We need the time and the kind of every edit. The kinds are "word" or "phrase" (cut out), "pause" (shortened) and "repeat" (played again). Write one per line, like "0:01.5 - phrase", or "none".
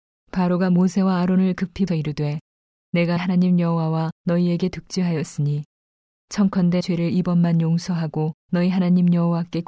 0:01.9 - word
0:03.2 - word
0:04.1 - pause
0:06.8 - word
0:08.4 - pause